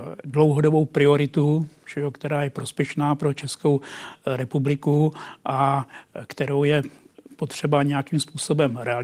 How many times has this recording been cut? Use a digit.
0